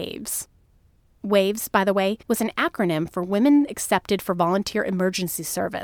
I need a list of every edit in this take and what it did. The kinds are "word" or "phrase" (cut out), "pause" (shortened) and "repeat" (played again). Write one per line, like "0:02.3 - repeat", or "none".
0:02.2 - pause

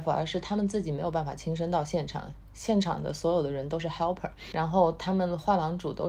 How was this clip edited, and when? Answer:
0:04.5 - word

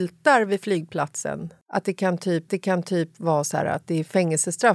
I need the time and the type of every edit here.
0:02.5 - repeat

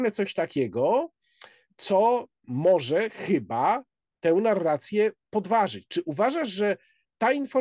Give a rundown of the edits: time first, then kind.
none

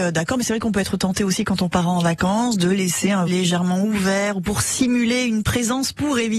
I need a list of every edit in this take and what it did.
0:03.3 - word

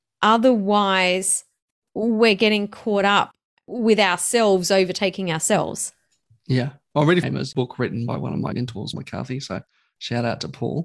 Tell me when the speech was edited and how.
0:07.2 - word
0:08.5 - word
0:08.9 - word

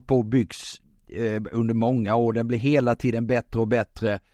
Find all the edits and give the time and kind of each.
none

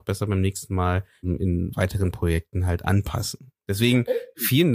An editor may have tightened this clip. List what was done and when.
none

